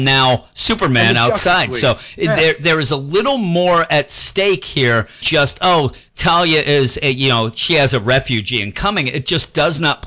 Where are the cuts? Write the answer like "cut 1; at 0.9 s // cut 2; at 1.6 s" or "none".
cut 1; at 5.2 s